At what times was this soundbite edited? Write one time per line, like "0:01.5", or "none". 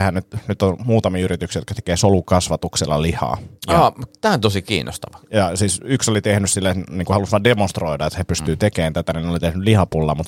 0:03.6